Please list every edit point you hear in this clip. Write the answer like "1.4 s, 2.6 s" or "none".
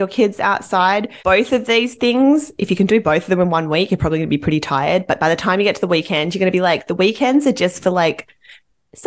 1.2 s